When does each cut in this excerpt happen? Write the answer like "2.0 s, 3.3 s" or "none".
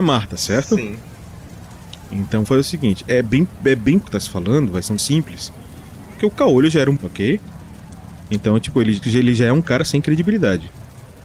2.4 s, 3.1 s, 4.0 s, 5.0 s, 6.2 s, 7.0 s, 9.0 s